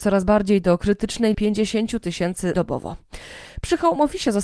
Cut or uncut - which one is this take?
cut